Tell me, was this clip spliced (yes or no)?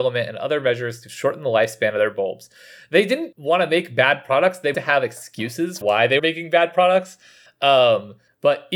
yes